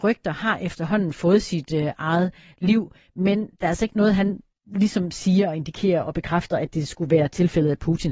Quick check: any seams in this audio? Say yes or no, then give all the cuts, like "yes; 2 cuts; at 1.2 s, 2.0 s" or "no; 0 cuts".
no; 0 cuts